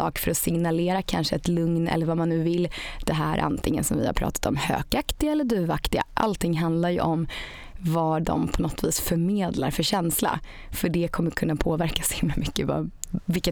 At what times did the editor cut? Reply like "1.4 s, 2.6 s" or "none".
none